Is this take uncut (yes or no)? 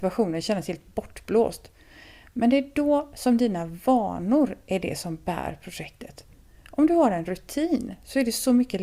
yes